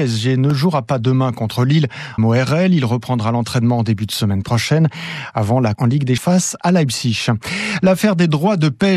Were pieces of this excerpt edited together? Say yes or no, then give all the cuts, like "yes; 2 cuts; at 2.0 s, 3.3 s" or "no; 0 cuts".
yes; 3 cuts; at 2.2 s, 5.8 s, 6.2 s